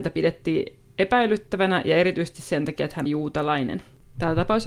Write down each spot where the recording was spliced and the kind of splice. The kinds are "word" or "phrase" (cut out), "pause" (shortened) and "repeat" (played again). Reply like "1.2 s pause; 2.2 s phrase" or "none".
3.1 s word